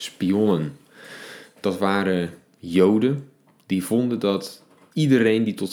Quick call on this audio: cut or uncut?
uncut